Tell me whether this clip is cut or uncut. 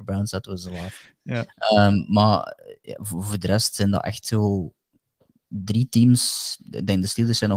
uncut